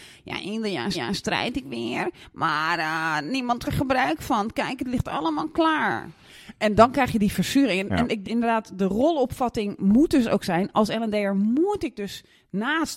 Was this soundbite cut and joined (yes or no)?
yes